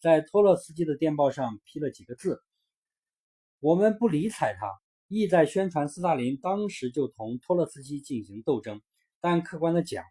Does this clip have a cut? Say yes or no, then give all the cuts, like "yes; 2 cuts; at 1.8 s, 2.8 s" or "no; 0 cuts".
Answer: yes; 1 cut; at 4.8 s